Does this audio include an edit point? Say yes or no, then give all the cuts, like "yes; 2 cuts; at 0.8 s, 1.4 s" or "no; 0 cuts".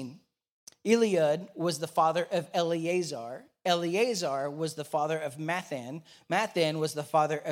no; 0 cuts